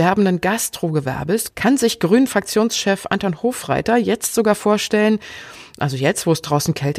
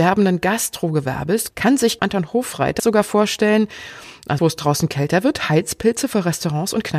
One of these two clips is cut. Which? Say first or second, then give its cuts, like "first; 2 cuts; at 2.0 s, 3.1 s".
second; 3 cuts; at 2.0 s, 2.8 s, 4.4 s